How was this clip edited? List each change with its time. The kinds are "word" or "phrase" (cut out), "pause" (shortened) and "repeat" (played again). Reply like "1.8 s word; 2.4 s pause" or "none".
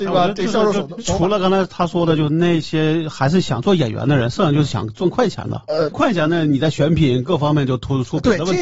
5.9 s word